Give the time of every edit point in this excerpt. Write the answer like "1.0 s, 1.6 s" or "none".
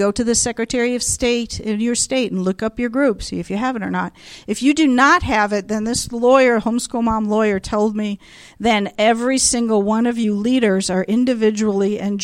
none